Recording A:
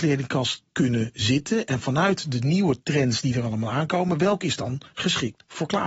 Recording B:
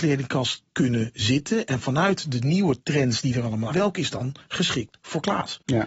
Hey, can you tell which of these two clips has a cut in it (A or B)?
B